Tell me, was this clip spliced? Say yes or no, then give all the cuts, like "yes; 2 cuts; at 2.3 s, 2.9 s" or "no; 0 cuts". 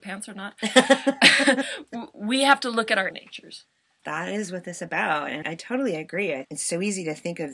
yes; 4 cuts; at 3.1 s, 4.0 s, 5.4 s, 6.4 s